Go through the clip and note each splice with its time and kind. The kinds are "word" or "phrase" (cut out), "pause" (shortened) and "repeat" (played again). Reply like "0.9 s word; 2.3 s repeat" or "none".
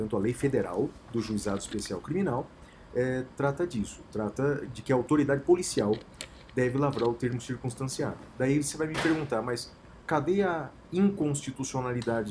3.3 s word